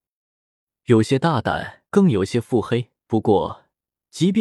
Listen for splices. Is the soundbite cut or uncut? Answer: cut